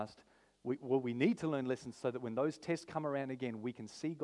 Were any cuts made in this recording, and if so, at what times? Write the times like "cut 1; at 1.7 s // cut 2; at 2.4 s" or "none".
none